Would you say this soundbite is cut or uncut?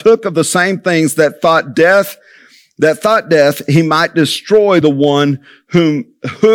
uncut